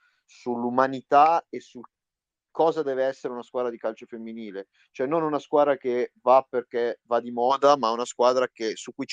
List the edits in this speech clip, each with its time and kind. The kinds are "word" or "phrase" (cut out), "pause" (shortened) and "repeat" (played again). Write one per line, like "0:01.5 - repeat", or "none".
none